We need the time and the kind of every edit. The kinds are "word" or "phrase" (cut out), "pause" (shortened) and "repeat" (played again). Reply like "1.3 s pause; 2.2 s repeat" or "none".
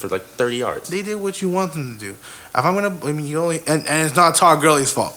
none